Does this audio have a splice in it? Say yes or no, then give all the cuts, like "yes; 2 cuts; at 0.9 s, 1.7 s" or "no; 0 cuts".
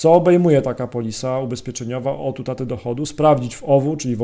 no; 0 cuts